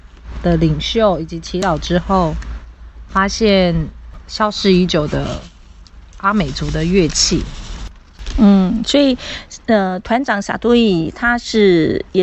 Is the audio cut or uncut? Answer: uncut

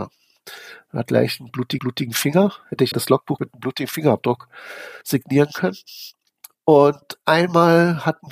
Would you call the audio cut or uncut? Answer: cut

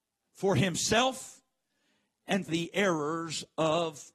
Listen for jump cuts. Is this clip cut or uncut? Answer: cut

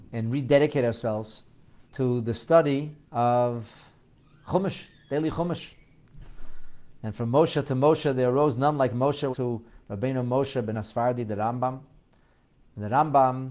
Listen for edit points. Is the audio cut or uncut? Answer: cut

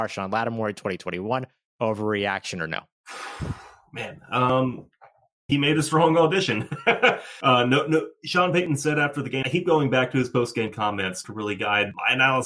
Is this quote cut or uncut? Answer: cut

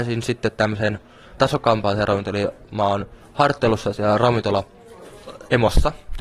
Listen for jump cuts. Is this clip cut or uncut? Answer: cut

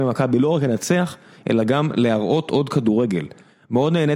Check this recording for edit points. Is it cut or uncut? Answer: uncut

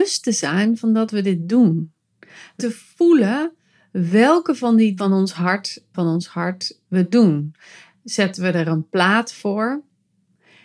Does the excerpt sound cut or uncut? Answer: cut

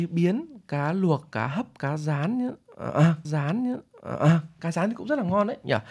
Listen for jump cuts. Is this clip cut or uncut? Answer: cut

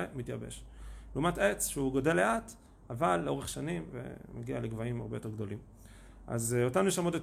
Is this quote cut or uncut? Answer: uncut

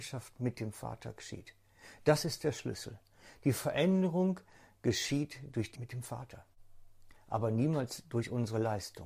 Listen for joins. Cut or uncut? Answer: cut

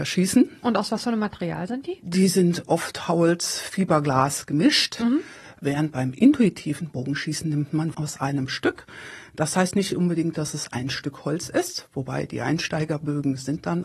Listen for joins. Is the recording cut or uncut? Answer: cut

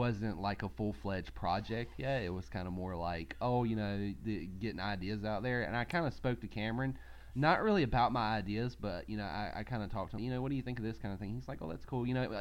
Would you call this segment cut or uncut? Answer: cut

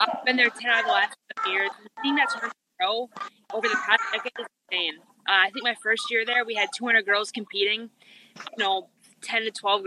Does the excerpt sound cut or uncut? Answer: cut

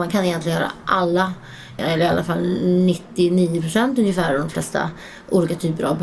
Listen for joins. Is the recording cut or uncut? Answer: cut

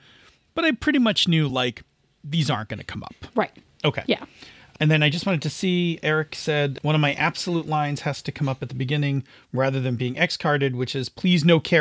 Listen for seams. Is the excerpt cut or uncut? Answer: uncut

